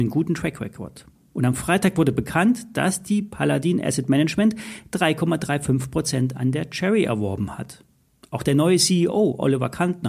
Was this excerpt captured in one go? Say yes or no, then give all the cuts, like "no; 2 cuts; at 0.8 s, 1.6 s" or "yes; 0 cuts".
yes; 0 cuts